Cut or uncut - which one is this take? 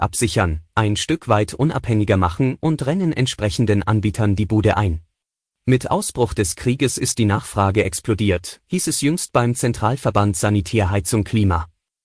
cut